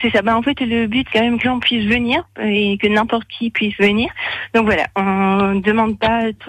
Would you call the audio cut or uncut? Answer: cut